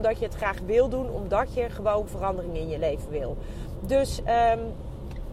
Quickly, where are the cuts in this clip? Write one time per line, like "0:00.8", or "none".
none